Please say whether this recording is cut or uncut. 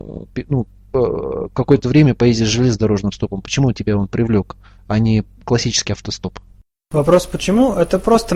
uncut